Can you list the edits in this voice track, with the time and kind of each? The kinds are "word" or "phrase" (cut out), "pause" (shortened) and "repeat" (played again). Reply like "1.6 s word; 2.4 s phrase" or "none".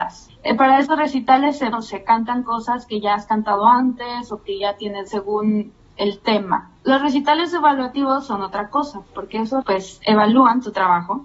1.7 s word; 5.1 s word; 6.8 s pause; 9.6 s word